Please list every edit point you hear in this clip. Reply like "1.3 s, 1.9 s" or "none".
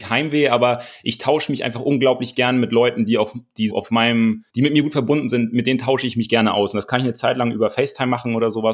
3.7 s, 4.5 s